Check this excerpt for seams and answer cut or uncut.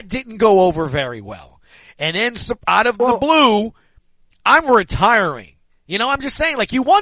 uncut